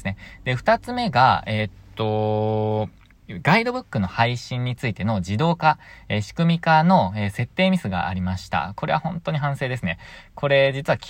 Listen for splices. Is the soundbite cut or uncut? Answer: uncut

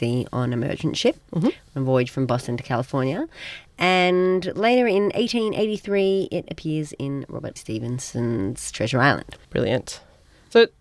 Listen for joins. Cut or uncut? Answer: cut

